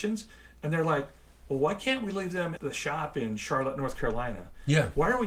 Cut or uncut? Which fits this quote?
cut